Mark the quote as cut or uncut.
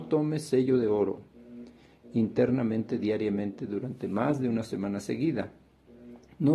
uncut